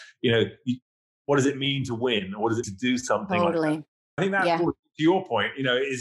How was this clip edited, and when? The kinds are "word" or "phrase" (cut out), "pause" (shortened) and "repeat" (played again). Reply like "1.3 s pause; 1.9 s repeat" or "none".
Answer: 2.6 s word; 4.2 s word